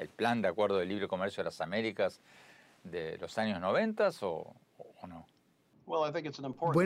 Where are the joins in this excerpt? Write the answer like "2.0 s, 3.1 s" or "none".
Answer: none